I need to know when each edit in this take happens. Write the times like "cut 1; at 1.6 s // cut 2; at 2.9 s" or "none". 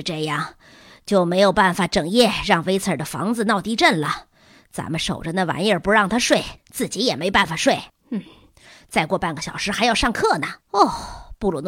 cut 1; at 6.6 s // cut 2; at 7.9 s // cut 3; at 10.6 s